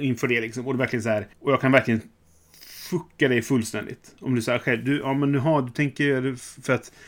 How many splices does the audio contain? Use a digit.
1